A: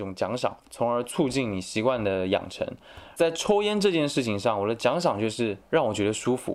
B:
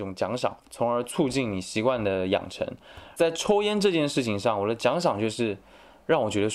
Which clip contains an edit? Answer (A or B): A